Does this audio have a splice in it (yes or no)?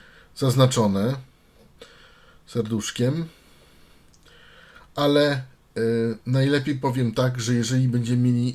no